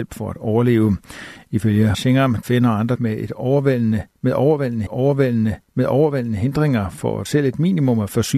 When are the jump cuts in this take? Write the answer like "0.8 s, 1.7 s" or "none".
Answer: 1.9 s, 2.4 s, 2.9 s, 4.9 s, 7.3 s